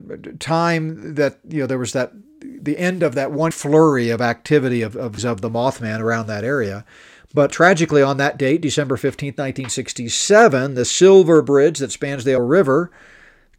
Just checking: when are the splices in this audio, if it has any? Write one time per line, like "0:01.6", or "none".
0:03.5
0:05.2
0:07.5
0:12.4

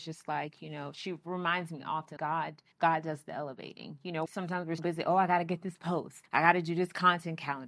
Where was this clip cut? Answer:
0:02.2
0:02.7
0:04.3
0:04.8
0:06.3

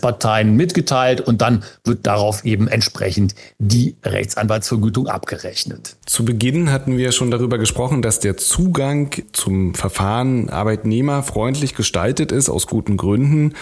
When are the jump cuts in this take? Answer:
0:06.0

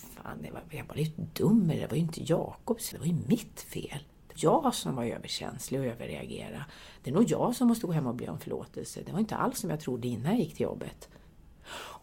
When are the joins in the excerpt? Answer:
0:02.9
0:04.4

